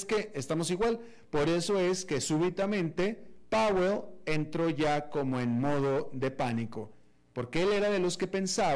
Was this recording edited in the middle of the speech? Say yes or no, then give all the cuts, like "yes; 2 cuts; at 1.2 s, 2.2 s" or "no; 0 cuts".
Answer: no; 0 cuts